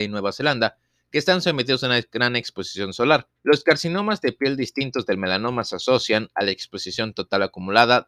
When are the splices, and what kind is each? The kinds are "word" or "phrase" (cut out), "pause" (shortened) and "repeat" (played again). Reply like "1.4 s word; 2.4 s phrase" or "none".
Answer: 3.4 s pause